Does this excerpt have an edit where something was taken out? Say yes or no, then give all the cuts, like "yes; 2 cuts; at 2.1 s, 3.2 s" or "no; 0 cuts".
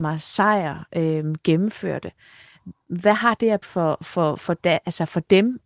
yes; 1 cut; at 3.6 s